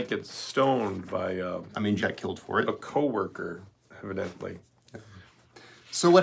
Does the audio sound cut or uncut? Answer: cut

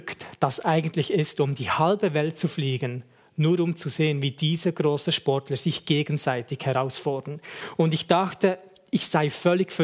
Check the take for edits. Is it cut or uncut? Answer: uncut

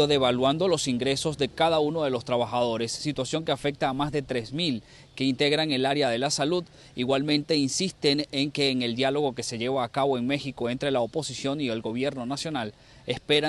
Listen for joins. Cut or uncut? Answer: uncut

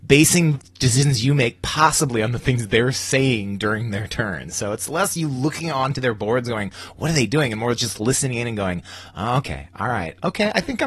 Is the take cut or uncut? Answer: uncut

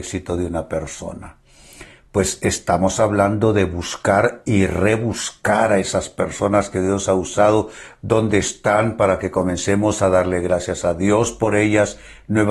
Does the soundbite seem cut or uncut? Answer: uncut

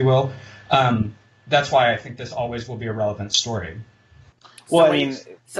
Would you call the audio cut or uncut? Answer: uncut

